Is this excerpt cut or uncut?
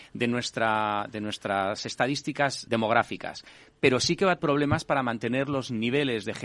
cut